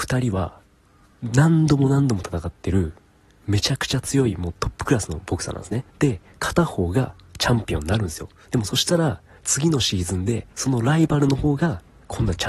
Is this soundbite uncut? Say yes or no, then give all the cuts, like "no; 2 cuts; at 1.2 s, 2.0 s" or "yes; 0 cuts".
no; 2 cuts; at 5.9 s, 10.5 s